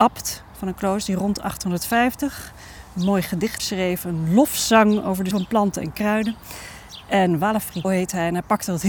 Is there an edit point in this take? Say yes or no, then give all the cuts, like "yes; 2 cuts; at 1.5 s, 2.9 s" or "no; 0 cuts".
yes; 3 cuts; at 3.6 s, 5.3 s, 7.8 s